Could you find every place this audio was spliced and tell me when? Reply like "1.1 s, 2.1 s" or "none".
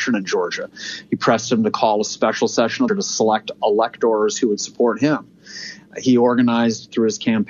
2.9 s